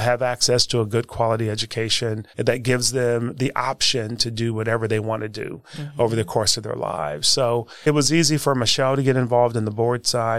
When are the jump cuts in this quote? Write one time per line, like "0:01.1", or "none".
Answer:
0:02.3